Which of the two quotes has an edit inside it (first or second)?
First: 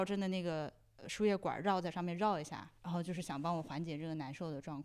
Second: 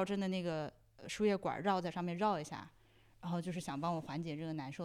first